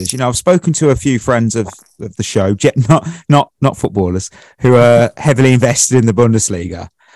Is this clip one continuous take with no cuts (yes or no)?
yes